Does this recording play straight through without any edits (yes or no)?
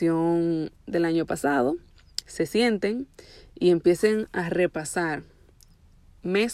yes